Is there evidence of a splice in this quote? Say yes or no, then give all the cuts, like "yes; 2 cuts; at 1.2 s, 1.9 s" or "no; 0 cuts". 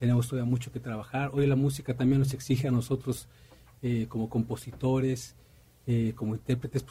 no; 0 cuts